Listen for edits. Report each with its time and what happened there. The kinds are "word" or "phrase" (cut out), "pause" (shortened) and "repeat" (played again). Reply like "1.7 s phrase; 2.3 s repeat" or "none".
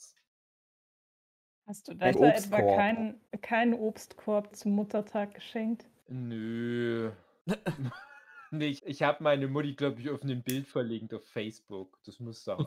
2.1 s word; 3.3 s pause; 4.5 s word; 8.8 s word